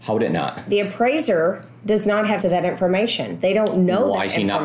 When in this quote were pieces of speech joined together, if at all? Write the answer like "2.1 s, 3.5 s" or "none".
2.4 s